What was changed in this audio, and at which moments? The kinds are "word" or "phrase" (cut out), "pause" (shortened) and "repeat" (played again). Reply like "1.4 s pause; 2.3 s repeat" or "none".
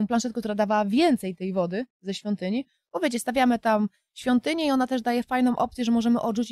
none